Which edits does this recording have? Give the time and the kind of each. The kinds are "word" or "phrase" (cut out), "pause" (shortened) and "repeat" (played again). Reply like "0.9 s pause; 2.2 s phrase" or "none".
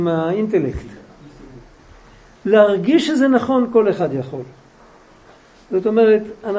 none